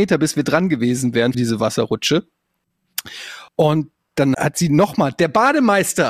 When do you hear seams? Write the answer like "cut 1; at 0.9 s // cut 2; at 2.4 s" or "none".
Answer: cut 1; at 1.3 s // cut 2; at 3.5 s // cut 3; at 4.3 s